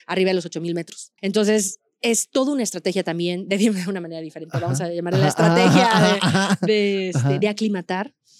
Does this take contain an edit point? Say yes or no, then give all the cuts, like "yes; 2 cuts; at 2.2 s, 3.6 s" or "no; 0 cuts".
yes; 1 cut; at 1.2 s